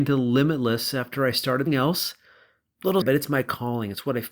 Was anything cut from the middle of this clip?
yes; 2 cuts; at 1.7 s, 3.0 s

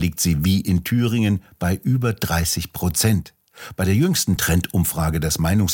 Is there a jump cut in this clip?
no; 0 cuts

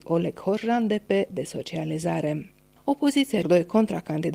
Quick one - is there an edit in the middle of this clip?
yes; 2 cuts; at 1.3 s, 3.4 s

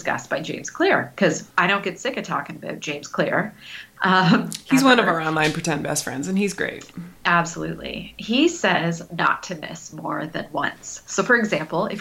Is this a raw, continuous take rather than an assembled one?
no; 2 cuts; at 1.5 s, 7.2 s

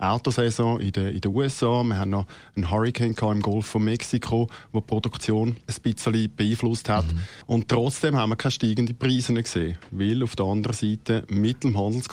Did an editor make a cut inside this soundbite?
no; 0 cuts

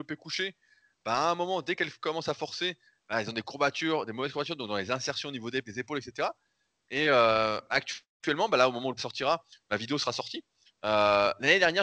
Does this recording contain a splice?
yes; 2 cuts; at 5.6 s, 9.0 s

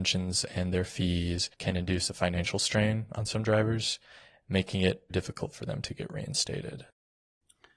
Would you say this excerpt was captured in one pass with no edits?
no; 2 cuts; at 1.5 s, 5.1 s

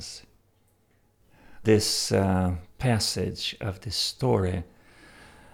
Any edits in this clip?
yes; 2 cuts; at 1.6 s, 2.7 s

